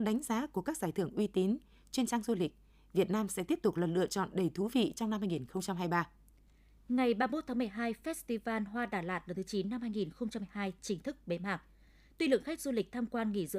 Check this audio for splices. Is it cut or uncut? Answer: uncut